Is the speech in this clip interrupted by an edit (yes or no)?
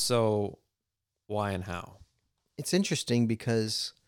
no